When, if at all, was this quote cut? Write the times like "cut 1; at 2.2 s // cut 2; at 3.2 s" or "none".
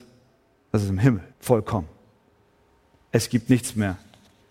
cut 1; at 1.3 s